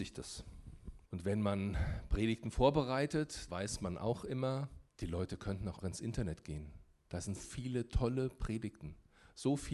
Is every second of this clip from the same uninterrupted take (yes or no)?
no